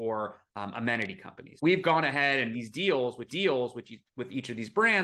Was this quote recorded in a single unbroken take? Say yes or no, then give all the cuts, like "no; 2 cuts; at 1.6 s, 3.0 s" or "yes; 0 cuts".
no; 3 cuts; at 1.6 s, 2.5 s, 3.3 s